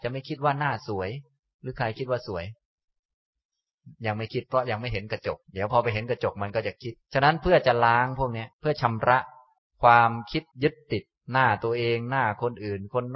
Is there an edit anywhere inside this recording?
yes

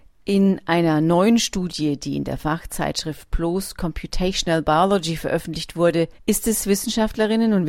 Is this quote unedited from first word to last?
no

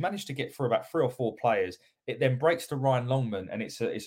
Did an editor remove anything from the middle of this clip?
no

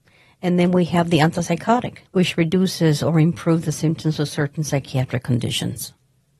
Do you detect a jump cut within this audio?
yes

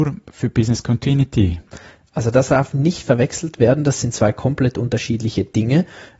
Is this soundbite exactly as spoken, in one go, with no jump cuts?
yes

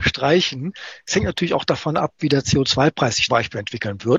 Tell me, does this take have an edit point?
yes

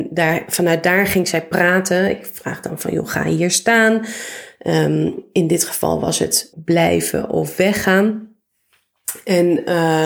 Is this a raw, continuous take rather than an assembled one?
no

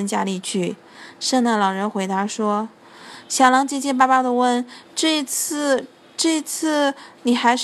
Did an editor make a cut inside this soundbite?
no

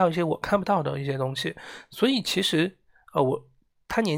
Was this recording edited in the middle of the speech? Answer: no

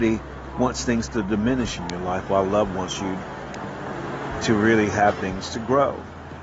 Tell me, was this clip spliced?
no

